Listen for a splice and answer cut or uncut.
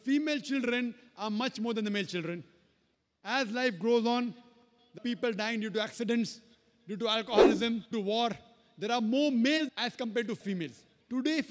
cut